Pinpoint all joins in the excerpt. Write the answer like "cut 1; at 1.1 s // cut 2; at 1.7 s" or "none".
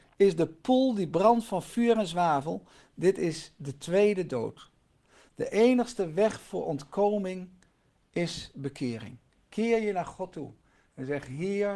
none

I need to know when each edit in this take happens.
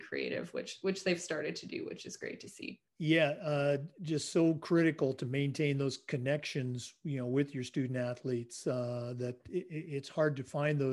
cut 1; at 2.9 s

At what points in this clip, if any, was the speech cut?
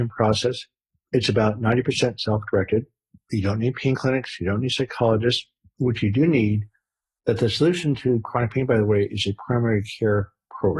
none

